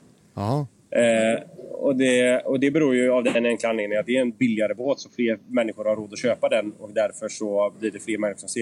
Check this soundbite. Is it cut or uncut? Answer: uncut